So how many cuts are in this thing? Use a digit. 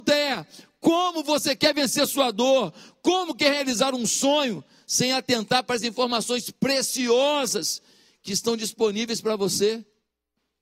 0